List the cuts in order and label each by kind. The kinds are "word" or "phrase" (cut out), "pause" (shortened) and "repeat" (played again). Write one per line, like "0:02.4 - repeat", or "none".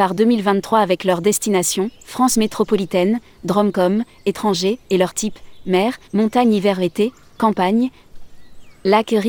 0:04.8 - pause
0:06.0 - pause